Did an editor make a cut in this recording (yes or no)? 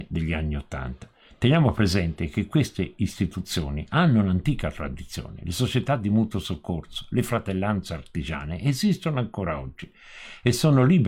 no